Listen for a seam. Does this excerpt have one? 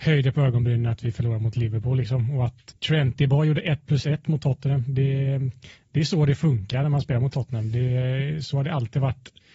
yes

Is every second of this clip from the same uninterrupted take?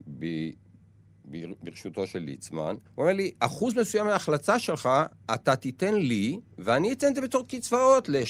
no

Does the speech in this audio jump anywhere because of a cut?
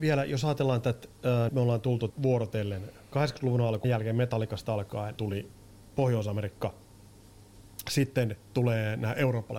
yes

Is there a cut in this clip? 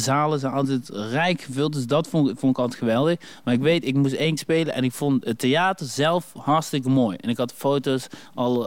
yes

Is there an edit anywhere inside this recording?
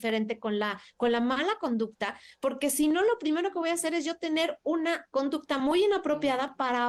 no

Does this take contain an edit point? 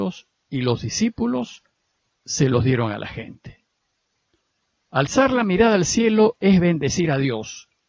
no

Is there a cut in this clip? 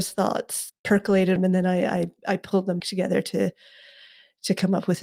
yes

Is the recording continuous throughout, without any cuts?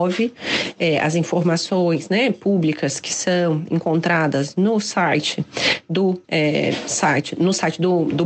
no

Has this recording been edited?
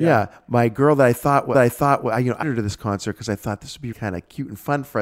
yes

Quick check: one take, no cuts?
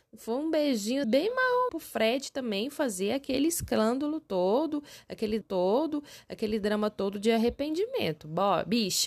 no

